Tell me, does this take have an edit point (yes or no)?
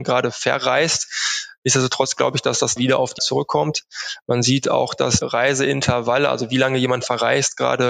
yes